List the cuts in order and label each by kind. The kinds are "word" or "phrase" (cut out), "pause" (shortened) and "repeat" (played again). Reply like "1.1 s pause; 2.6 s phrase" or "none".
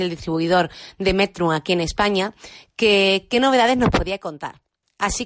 none